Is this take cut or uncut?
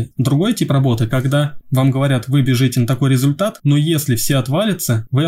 uncut